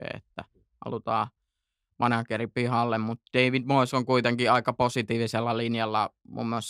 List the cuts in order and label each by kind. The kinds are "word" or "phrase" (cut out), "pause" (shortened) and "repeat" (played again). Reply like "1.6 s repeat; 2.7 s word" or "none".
none